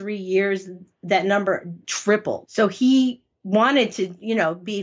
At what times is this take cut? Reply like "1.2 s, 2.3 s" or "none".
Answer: none